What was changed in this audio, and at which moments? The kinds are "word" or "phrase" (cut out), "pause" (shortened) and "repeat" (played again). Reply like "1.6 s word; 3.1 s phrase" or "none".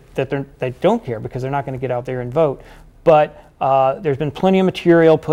none

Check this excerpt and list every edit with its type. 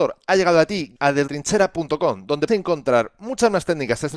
1.0 s word; 1.3 s word; 2.5 s word

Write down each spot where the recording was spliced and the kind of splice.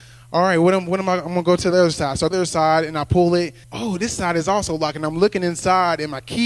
2.3 s phrase; 3.6 s pause

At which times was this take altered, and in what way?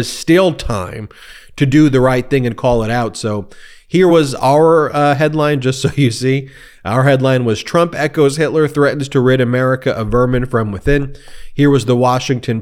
none

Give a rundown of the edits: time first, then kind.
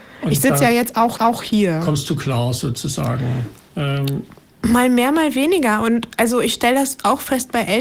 1.2 s repeat

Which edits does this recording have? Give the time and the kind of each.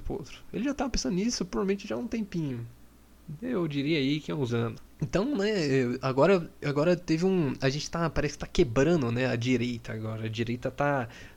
4.5 s word

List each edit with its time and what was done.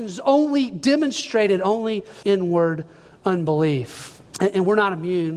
2.2 s phrase; 4.3 s pause

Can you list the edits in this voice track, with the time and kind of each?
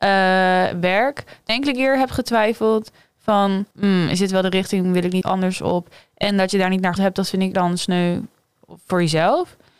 1.5 s phrase; 3.7 s pause; 5.2 s word; 7.0 s word; 7.5 s word

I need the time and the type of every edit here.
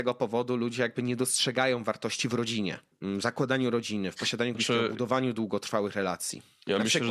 2.9 s pause; 4.5 s word

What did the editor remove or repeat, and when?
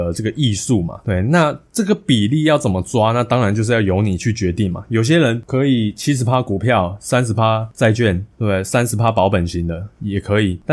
none

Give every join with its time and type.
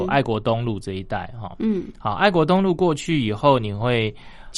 none

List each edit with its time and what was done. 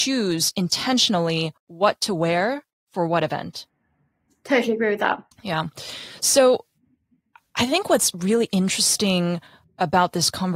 1.6 s pause; 5.3 s pause

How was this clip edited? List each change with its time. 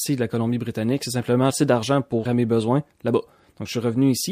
1.5 s phrase; 2.2 s word

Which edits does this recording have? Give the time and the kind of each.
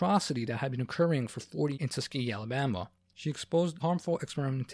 1.7 s word; 3.8 s word

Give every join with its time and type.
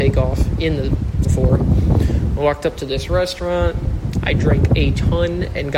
1.2 s word

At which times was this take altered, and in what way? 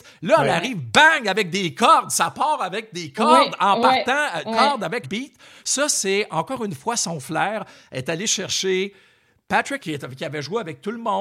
4.4 s word; 5.0 s word; 9.8 s word

